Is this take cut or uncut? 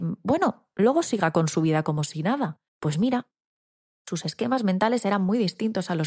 cut